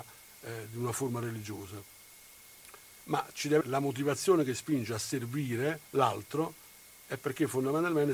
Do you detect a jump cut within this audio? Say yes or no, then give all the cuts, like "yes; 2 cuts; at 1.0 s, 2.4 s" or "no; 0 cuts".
yes; 2 cuts; at 3.6 s, 5.9 s